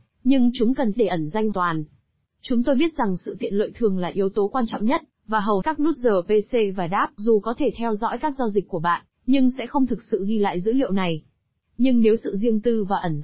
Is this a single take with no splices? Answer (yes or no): no